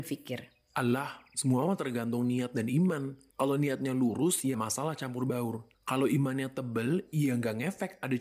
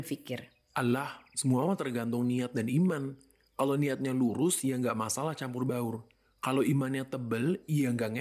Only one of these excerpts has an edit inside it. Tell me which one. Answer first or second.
first